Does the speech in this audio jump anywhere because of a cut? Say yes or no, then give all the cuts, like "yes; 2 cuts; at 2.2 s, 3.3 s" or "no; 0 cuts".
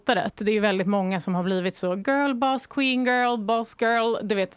no; 0 cuts